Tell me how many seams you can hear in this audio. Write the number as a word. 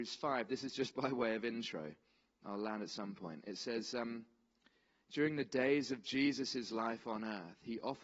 zero